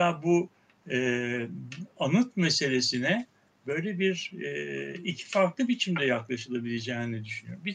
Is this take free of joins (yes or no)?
yes